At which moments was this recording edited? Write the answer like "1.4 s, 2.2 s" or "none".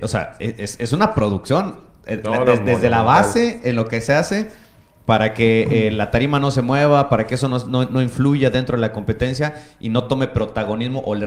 none